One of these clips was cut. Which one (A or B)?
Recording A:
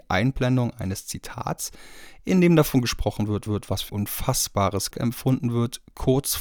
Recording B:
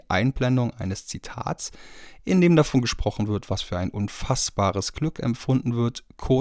A